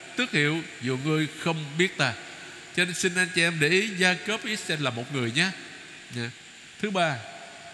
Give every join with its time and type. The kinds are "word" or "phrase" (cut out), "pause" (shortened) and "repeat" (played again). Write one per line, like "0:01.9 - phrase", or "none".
none